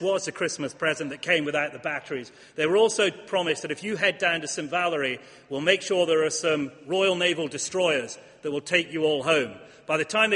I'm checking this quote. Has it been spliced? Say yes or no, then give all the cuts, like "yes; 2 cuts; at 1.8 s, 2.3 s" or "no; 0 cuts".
no; 0 cuts